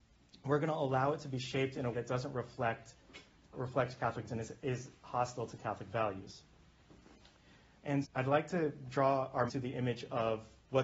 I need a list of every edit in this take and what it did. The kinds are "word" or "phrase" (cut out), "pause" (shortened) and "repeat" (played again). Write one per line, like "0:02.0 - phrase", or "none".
0:01.9 - word
0:03.5 - word
0:04.3 - word
0:08.0 - word
0:09.5 - word